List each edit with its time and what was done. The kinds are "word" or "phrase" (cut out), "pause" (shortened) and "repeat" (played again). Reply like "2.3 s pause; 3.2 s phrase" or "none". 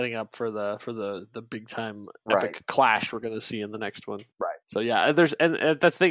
none